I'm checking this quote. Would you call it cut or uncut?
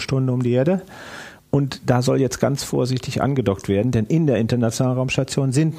uncut